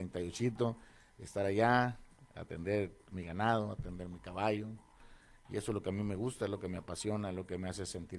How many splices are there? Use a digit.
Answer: 0